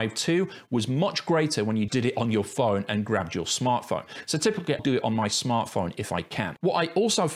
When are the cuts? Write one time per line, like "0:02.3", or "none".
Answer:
0:01.9
0:04.8